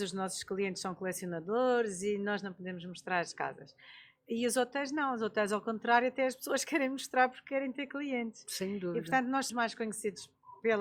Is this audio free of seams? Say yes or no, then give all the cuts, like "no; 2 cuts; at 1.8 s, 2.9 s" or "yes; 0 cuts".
no; 1 cut; at 9.5 s